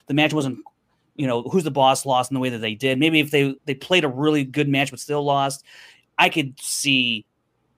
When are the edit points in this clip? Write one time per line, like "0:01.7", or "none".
0:03.6

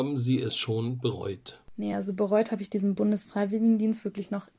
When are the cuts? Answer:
none

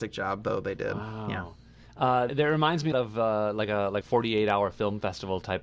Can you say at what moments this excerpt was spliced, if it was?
0:02.3
0:02.9
0:04.0

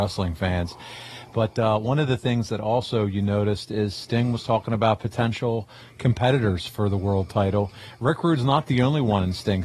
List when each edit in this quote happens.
none

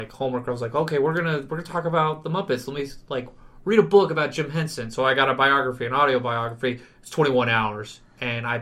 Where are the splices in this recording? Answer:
none

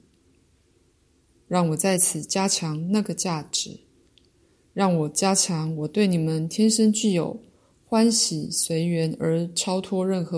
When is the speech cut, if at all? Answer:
none

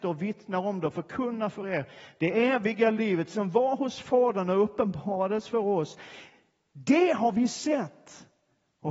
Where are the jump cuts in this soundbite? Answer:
none

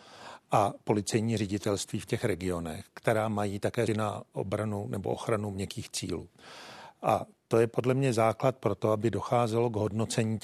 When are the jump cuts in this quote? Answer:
0:03.9

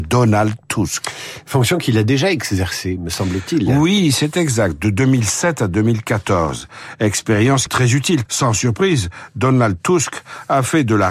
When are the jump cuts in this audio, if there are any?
0:07.7
0:08.3

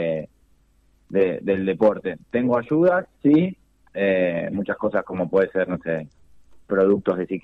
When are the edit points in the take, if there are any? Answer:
none

